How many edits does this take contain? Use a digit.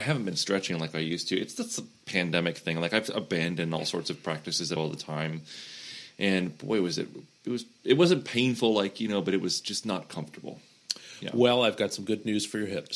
1